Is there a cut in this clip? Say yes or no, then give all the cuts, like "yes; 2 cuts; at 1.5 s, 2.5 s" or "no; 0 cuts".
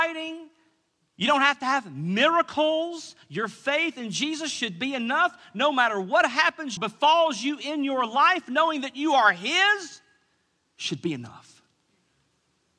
yes; 1 cut; at 6.8 s